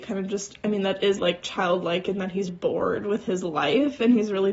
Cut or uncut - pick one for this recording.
cut